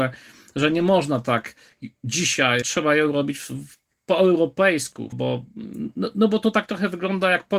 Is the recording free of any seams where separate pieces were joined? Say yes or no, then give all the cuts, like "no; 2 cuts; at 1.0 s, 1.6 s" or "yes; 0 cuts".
no; 2 cuts; at 2.6 s, 5.1 s